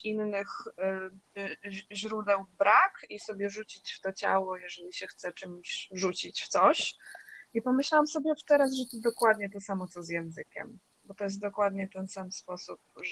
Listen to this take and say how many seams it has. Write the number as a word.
one